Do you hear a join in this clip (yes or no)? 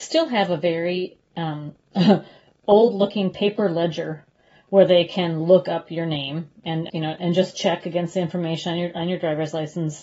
yes